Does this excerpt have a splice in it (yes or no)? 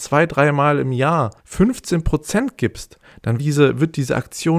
yes